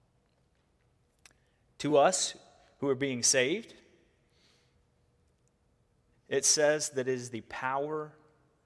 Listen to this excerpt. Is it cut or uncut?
uncut